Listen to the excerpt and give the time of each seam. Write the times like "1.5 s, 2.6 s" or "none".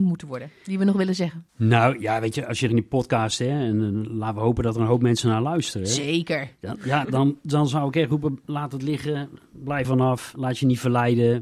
1.5 s, 2.7 s, 7.0 s, 9.8 s